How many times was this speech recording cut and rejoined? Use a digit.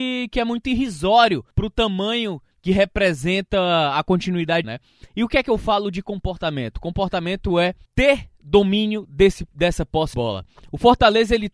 5